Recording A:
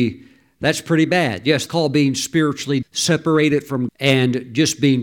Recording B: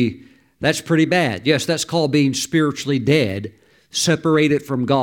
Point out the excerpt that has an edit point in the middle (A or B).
A